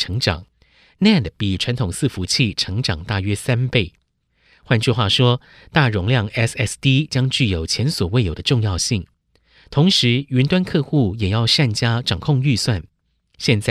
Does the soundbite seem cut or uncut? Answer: uncut